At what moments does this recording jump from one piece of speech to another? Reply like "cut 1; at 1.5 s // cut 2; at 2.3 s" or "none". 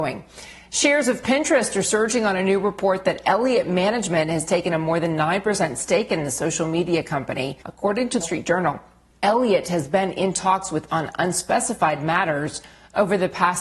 cut 1; at 7.6 s // cut 2; at 8.2 s // cut 3; at 9.1 s // cut 4; at 10.9 s